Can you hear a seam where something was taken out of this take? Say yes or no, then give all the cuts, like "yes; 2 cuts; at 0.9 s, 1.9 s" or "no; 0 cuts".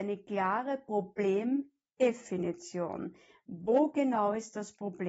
no; 0 cuts